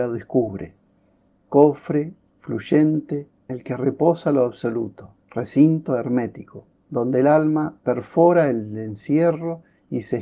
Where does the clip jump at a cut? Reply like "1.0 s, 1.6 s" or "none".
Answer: 3.5 s, 5.2 s, 6.8 s